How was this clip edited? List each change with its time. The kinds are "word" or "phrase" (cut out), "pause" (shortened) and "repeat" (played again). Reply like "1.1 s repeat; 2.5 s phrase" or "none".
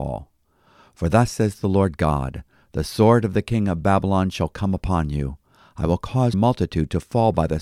6.3 s word